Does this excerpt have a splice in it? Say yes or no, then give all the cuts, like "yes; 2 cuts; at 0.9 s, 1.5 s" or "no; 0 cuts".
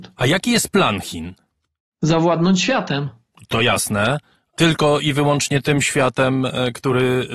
no; 0 cuts